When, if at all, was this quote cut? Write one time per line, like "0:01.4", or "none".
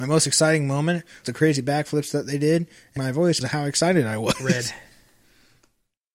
0:01.2
0:03.0
0:03.4